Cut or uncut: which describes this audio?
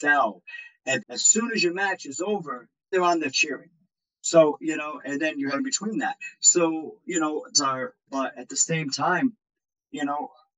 cut